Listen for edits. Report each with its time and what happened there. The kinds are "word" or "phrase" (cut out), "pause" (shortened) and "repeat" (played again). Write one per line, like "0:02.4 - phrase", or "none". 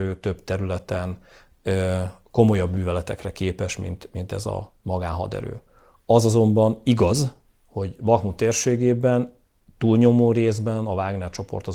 none